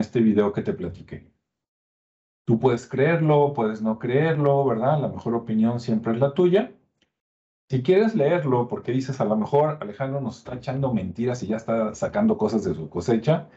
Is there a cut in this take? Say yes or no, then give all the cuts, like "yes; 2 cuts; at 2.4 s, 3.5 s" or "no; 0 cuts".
no; 0 cuts